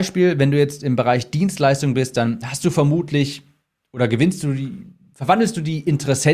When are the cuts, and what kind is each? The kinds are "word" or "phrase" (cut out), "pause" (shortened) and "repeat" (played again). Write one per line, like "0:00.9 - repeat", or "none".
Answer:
none